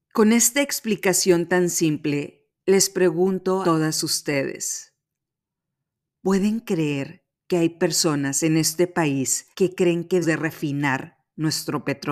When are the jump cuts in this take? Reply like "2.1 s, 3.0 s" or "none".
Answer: 3.6 s, 9.5 s, 10.2 s